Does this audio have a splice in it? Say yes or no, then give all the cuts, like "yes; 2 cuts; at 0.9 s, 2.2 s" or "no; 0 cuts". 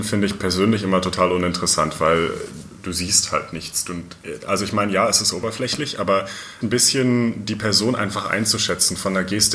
yes; 1 cut; at 6.6 s